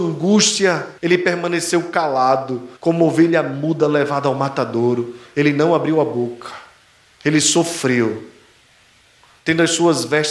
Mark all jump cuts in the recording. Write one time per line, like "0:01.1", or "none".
0:01.0
0:02.8
0:07.1